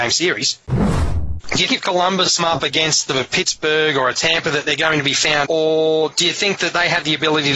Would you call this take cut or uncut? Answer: cut